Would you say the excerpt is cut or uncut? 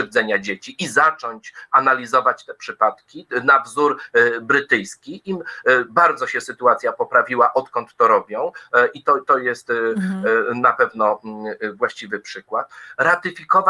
uncut